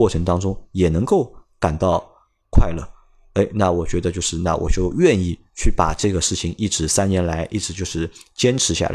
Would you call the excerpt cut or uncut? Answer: uncut